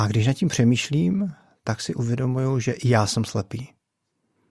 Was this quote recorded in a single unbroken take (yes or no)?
yes